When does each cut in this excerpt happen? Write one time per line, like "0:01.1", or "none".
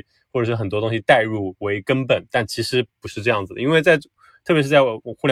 none

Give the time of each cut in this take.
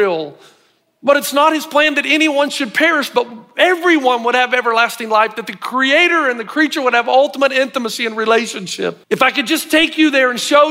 0:09.0

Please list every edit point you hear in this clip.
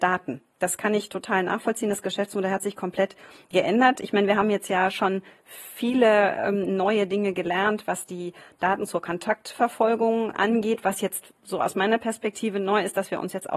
0:11.4

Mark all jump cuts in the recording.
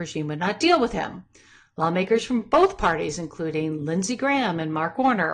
none

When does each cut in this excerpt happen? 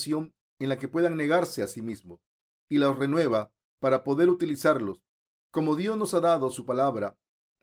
none

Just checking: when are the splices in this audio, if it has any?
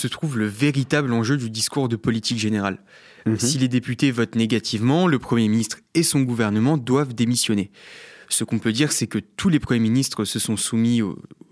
none

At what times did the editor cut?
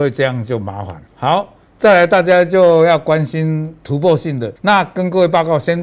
0:01.1
0:04.6

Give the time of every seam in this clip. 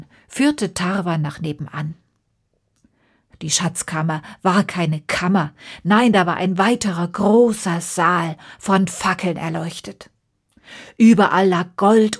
none

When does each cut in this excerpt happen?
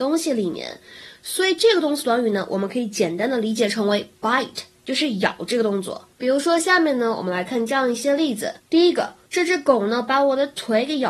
0:06.1
0:08.6

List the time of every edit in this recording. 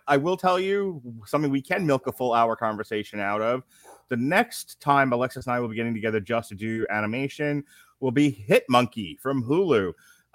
none

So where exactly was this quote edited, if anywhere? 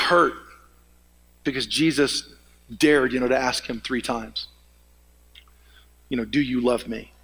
none

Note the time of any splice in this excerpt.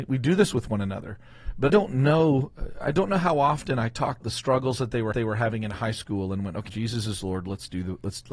0:01.7
0:04.2
0:05.1
0:06.7

